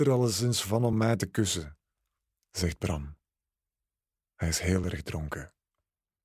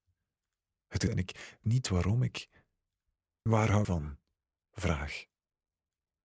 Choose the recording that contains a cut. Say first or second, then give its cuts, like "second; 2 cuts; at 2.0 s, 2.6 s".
second; 4 cuts; at 1.1 s, 1.6 s, 3.5 s, 3.8 s